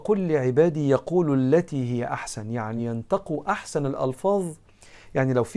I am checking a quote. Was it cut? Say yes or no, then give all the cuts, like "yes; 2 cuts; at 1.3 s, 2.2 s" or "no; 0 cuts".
no; 0 cuts